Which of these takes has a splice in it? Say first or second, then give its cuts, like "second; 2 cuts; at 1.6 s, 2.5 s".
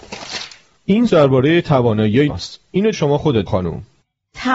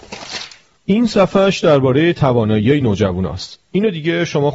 first; 4 cuts; at 1.1 s, 2.3 s, 2.9 s, 3.5 s